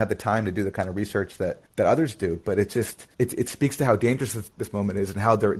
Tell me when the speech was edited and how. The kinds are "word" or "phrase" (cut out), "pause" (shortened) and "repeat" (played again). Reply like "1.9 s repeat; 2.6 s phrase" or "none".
1.7 s pause; 3.1 s pause